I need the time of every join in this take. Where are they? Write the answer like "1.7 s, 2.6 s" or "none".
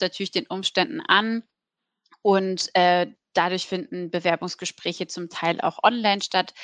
none